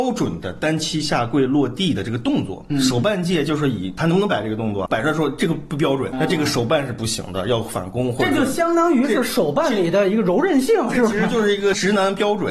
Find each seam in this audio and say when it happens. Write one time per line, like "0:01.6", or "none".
0:04.9
0:06.1